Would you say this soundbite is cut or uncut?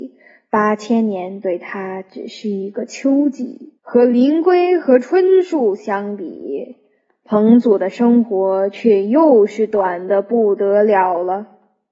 cut